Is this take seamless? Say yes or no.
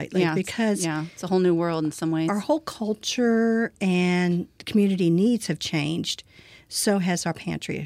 yes